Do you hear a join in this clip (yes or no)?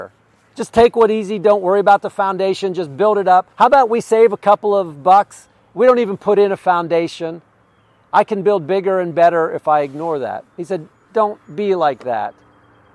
yes